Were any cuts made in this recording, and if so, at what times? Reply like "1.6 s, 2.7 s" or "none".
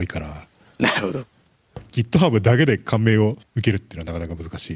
none